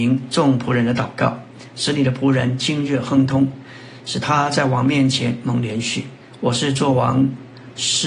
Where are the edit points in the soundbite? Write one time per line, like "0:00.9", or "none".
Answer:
0:06.2